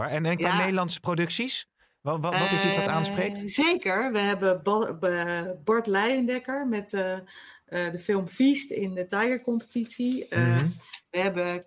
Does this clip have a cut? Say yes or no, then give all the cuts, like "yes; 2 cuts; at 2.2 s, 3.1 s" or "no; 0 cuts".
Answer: no; 0 cuts